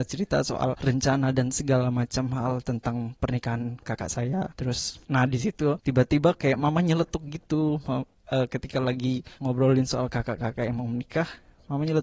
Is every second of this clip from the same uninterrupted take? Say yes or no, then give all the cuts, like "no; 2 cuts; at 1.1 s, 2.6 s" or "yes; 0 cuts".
no; 1 cut; at 9.4 s